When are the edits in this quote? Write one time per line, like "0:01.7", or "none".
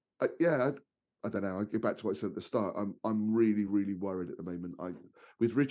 none